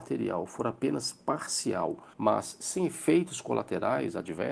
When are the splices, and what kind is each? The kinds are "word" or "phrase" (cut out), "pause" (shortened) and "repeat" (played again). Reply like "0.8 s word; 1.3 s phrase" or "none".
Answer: 2.1 s pause

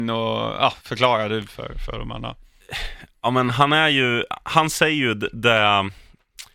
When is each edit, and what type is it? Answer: none

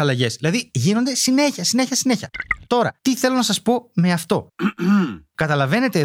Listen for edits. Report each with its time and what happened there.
3.0 s pause

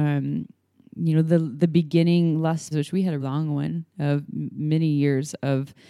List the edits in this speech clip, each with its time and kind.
2.7 s word; 3.2 s word

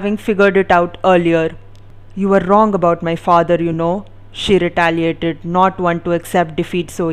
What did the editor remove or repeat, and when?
none

